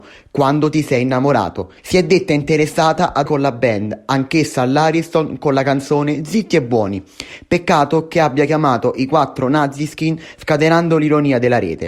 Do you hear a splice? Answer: yes; 2 cuts; at 1.8 s, 3.3 s

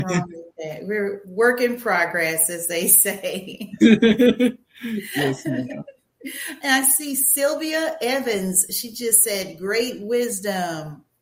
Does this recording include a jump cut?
no; 0 cuts

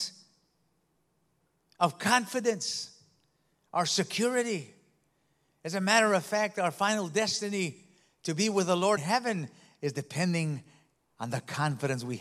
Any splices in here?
yes; 1 cut; at 9.0 s

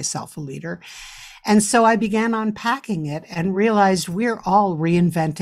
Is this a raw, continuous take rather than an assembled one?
yes; 0 cuts

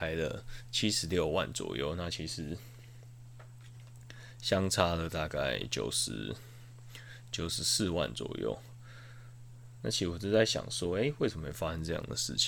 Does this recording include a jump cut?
no; 0 cuts

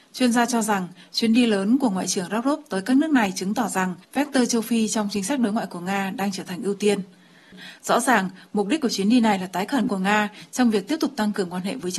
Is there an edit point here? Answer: yes; 2 cuts; at 4.0 s, 9.9 s

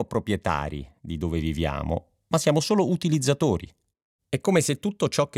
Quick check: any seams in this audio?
no; 0 cuts

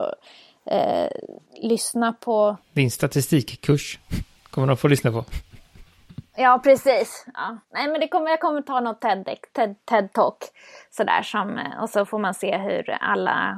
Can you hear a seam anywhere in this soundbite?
yes; 3 cuts; at 1.5 s, 2.6 s, 7.6 s

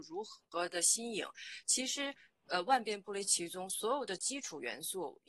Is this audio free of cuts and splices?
yes; 0 cuts

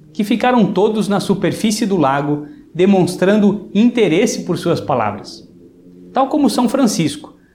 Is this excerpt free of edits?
yes; 0 cuts

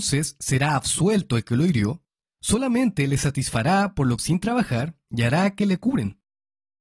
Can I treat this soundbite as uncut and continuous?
no; 1 cut; at 4.2 s

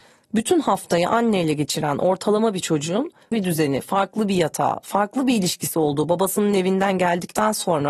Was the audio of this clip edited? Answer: yes; 1 cut; at 3.3 s

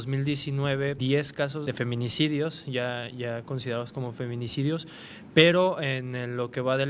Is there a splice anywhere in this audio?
yes; 2 cuts; at 1.0 s, 1.7 s

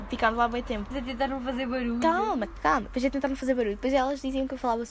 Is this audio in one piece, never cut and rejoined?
no; 1 cut; at 0.9 s

